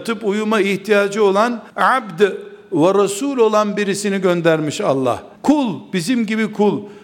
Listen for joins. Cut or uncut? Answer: cut